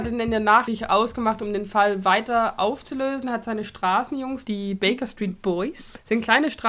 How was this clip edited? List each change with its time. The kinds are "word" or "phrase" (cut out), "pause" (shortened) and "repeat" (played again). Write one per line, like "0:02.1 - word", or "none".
0:04.4 - word